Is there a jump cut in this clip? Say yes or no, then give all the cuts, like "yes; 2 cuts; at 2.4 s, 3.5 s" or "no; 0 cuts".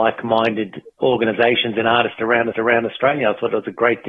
yes; 2 cuts; at 1.0 s, 2.5 s